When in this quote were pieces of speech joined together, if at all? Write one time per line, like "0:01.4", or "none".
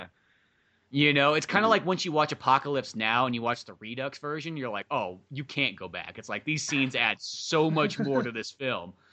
none